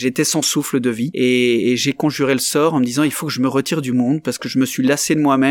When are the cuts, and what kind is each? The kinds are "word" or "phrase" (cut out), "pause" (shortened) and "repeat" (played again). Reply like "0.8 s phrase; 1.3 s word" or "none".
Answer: none